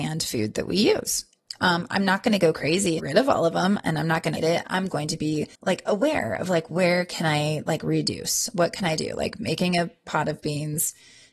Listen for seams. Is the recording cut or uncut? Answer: cut